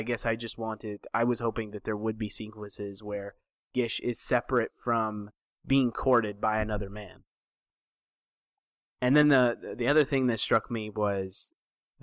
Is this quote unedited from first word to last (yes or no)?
yes